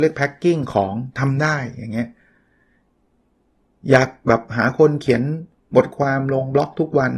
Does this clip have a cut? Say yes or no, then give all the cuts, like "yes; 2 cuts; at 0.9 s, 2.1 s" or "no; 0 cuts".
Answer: no; 0 cuts